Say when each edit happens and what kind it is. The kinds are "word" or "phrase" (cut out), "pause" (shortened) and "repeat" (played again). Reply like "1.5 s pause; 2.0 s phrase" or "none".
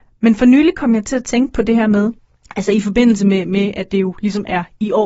none